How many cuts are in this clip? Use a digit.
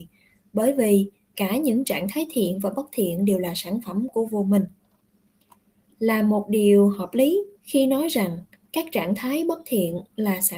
2